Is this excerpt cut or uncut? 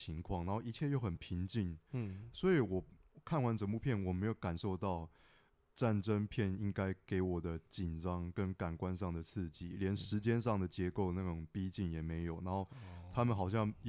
uncut